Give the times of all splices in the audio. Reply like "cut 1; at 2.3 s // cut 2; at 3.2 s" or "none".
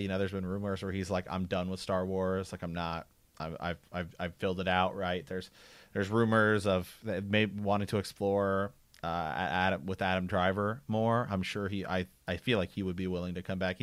none